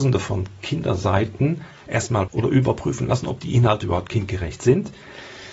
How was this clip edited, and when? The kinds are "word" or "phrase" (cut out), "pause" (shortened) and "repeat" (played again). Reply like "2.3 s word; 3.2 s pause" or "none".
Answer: 2.3 s word